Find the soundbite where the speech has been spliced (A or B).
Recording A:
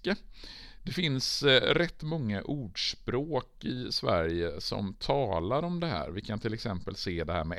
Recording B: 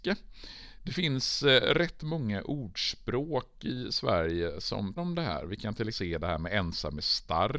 B